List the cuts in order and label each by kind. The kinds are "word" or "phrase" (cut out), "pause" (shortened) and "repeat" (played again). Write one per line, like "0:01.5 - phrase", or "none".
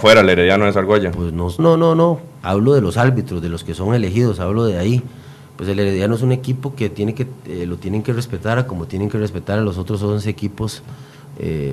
0:01.6 - word